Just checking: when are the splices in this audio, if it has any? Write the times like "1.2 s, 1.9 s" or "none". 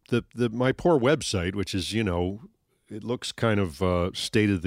none